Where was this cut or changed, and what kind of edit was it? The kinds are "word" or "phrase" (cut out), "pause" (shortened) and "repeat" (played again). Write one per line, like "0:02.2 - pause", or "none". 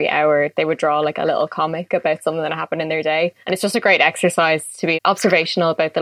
0:03.4 - pause
0:04.9 - word